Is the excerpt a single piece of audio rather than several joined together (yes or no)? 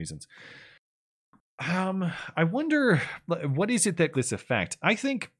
no